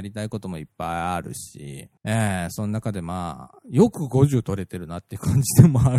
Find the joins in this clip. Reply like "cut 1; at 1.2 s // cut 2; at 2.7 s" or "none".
cut 1; at 2.0 s